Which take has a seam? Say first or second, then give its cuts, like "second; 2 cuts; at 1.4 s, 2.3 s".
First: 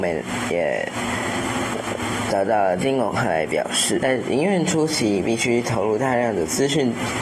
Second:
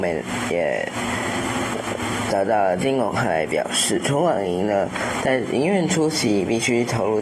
first; 1 cut; at 4.0 s